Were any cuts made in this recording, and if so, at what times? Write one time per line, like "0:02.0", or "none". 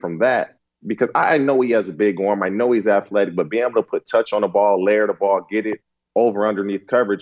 none

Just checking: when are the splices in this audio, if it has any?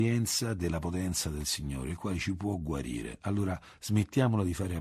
none

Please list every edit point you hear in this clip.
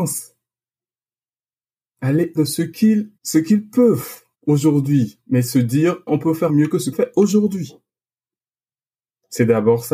0:02.4
0:03.2
0:04.3
0:06.1
0:06.5
0:06.9

